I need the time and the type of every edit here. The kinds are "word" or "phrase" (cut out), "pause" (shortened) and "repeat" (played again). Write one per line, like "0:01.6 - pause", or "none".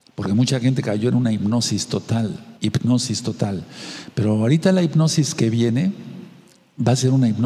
0:02.6 - pause